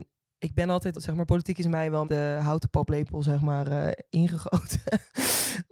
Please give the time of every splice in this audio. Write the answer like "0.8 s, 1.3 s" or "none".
0.9 s, 2.0 s, 4.1 s